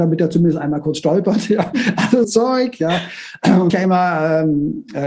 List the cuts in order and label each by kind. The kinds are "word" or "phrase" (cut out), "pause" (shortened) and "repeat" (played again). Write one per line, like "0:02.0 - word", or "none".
0:02.2 - phrase
0:03.7 - phrase